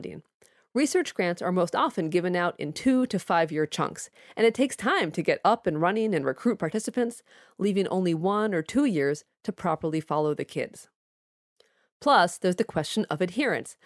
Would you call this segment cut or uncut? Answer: uncut